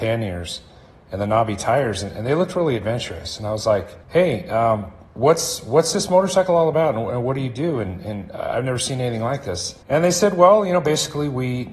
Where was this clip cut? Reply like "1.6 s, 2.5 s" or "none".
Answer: 4.0 s, 9.8 s